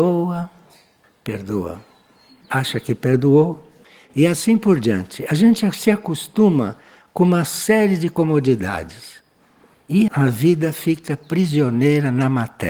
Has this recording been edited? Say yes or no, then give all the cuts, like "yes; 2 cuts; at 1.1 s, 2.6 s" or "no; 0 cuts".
yes; 1 cut; at 10.1 s